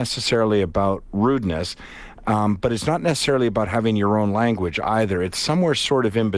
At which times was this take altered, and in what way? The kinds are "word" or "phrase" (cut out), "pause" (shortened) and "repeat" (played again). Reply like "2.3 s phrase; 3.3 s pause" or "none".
none